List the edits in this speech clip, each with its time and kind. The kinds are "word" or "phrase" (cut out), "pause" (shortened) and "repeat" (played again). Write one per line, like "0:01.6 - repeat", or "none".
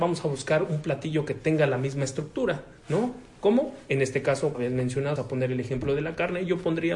0:02.8 - pause
0:04.5 - word
0:05.2 - word